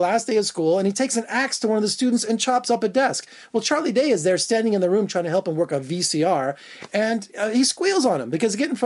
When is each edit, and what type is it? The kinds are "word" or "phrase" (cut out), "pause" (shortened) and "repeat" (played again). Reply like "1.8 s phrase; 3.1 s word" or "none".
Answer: none